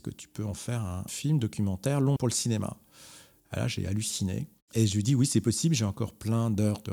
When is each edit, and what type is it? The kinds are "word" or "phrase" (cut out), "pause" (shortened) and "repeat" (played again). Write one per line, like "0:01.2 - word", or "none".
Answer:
0:01.1 - word
0:02.2 - word